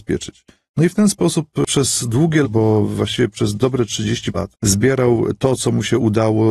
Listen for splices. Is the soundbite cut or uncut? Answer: cut